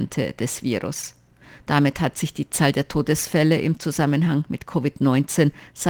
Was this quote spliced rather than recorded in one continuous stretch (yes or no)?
no